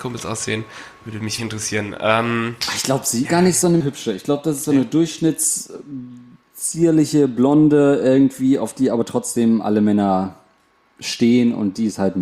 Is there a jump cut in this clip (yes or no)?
yes